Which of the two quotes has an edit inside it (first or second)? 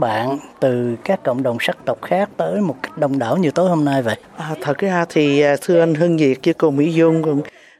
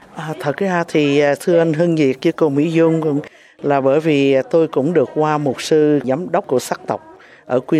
first